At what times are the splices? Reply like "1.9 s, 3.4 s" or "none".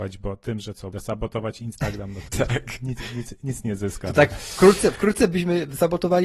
0.9 s, 2.3 s